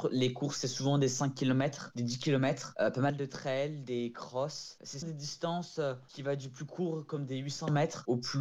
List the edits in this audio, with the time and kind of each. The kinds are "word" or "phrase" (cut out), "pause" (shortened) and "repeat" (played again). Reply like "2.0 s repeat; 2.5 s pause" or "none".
5.0 s word